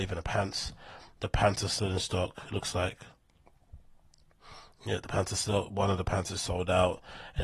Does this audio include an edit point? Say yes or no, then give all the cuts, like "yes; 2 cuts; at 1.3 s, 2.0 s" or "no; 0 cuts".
no; 0 cuts